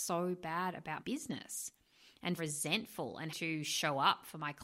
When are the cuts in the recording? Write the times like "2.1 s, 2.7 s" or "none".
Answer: 1.0 s, 2.4 s, 3.3 s